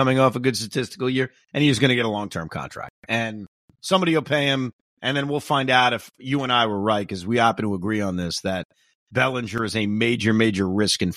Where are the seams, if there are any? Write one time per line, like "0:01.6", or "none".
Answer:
none